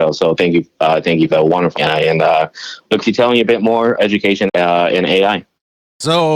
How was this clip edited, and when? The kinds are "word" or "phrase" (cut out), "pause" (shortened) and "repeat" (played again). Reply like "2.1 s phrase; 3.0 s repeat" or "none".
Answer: 1.3 s word; 1.7 s word; 3.0 s word; 3.9 s word; 4.5 s word